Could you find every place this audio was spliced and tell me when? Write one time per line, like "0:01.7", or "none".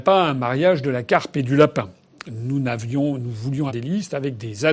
0:03.7